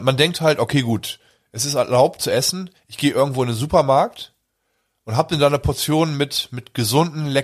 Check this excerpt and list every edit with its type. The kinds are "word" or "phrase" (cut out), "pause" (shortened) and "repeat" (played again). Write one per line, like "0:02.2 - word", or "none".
none